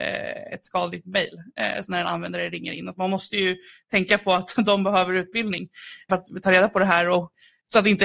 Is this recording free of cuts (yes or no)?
yes